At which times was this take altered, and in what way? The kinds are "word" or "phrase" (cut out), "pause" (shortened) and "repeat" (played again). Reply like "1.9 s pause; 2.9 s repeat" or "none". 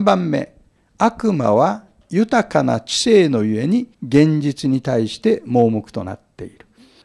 3.9 s pause